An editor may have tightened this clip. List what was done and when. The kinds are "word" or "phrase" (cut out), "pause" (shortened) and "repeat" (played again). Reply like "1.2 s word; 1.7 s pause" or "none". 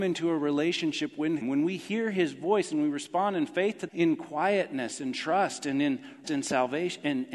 1.4 s word; 3.9 s word; 6.2 s word